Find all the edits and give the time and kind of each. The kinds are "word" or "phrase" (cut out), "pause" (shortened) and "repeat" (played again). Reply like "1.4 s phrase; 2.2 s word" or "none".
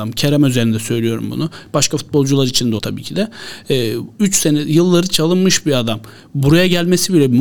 2.8 s word